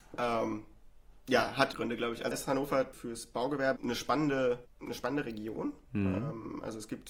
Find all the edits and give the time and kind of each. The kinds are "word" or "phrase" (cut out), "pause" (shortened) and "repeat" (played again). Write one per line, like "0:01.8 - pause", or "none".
0:01.7 - word
0:02.3 - word
0:02.9 - word
0:03.8 - word
0:04.7 - pause

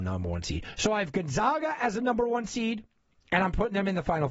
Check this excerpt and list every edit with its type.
none

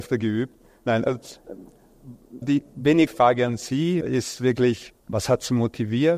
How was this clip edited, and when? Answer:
0:02.4 - word
0:03.1 - word
0:04.0 - word
0:05.0 - pause

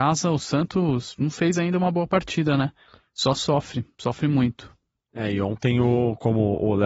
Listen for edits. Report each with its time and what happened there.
none

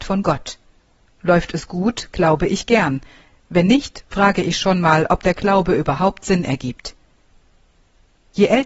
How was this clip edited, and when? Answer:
none

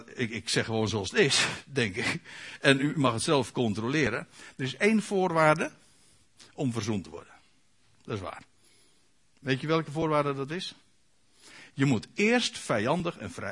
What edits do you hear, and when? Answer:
none

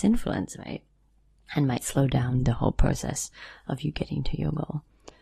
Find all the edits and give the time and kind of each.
none

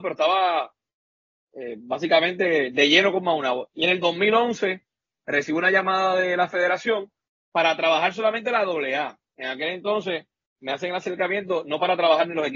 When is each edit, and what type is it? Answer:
none

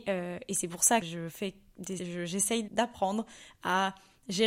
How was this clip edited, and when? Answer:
0:01.0 - word
0:02.0 - word
0:02.7 - word

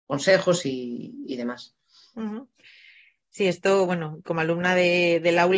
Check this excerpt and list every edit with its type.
none

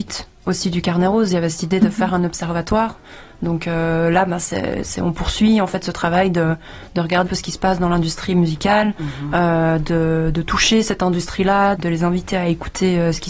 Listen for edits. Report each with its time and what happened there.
0:07.3 - word
0:11.7 - word

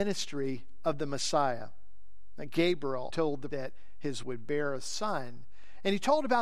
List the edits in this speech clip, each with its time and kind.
0:03.1 - word
0:03.5 - word
0:04.2 - word

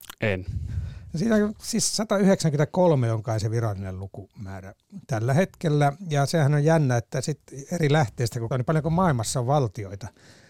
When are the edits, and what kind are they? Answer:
0:08.5 - word

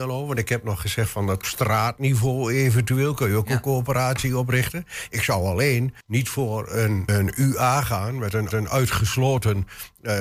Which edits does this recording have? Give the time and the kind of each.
0:01.4 - phrase
0:06.0 - pause
0:07.1 - word
0:08.5 - repeat

